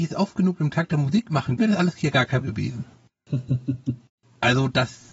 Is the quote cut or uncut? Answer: cut